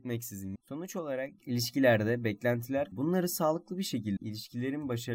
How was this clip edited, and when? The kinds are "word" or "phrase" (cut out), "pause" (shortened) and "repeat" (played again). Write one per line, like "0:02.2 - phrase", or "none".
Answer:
0:02.9 - phrase
0:04.2 - word